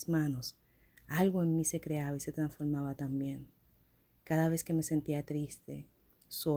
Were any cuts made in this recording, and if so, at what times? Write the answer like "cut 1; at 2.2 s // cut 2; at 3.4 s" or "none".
none